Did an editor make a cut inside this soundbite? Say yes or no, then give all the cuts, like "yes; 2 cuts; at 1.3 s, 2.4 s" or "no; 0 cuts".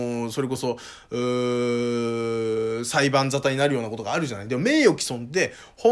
no; 0 cuts